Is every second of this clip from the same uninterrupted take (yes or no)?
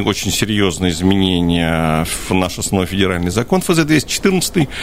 yes